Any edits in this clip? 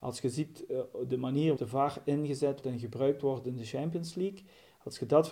yes; 2 cuts; at 1.6 s, 2.6 s

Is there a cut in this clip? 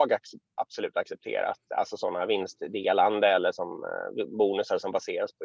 no; 0 cuts

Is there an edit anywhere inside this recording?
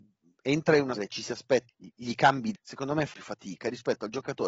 yes; 4 cuts; at 0.9 s, 1.7 s, 2.5 s, 3.1 s

